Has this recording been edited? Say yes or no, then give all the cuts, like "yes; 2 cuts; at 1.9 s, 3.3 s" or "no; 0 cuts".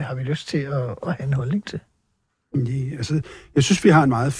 no; 0 cuts